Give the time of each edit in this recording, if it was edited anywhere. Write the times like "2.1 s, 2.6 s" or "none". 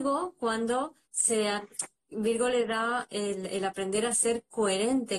1.0 s